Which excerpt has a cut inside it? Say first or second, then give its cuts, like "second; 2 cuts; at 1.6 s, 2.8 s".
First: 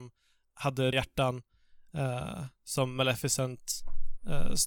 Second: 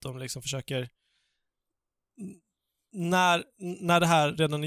first; 1 cut; at 0.9 s